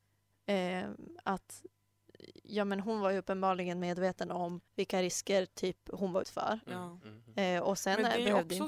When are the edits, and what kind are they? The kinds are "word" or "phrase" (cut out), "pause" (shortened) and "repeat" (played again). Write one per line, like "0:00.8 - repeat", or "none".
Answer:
0:04.7 - pause
0:06.2 - word